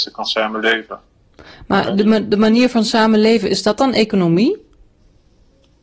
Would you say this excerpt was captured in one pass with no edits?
yes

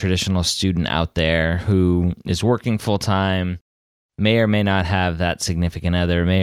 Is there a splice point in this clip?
no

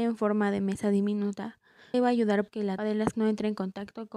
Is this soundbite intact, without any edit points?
no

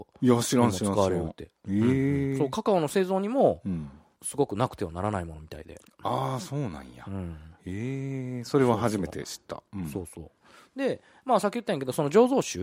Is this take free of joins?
yes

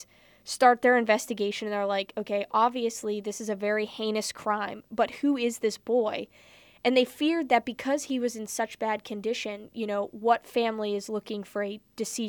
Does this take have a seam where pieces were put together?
no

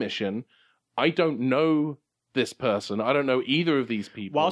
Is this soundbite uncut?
yes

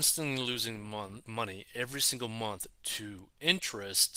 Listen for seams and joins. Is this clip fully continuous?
no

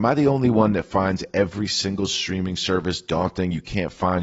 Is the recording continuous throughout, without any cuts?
yes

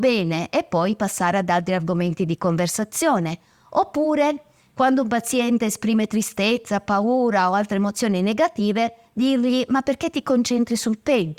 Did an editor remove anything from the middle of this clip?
no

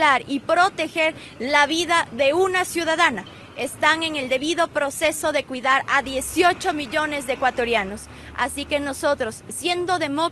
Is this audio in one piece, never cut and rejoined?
yes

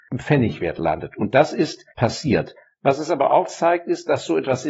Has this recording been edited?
no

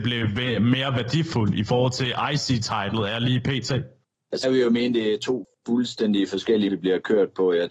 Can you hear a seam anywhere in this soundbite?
yes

